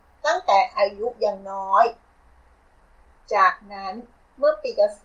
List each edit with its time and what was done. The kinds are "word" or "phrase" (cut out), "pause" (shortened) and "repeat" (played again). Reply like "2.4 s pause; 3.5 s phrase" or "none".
none